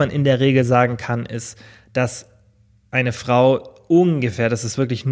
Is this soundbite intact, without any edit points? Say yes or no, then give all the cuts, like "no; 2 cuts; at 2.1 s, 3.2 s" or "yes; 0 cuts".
yes; 0 cuts